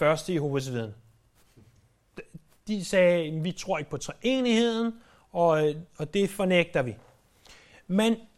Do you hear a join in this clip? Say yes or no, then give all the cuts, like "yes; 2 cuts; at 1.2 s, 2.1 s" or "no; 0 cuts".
no; 0 cuts